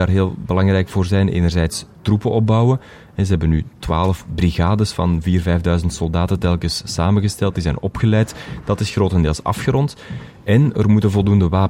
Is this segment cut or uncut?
uncut